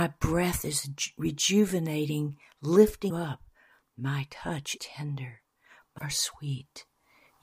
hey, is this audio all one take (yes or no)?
no